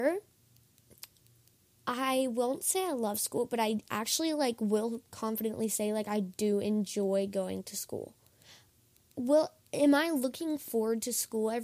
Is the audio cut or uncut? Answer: uncut